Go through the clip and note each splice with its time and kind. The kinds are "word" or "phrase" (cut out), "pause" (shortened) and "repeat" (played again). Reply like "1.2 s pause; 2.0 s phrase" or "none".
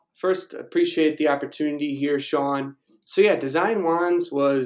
none